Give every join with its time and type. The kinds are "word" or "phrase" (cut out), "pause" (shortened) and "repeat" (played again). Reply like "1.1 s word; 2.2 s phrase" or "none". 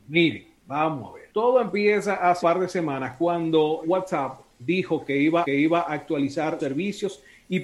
1.3 s pause; 2.4 s word; 3.8 s word; 5.4 s repeat; 6.6 s word